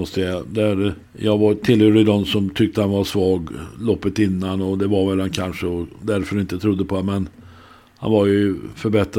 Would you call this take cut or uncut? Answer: cut